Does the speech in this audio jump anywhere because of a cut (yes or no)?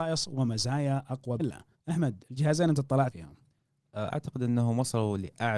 yes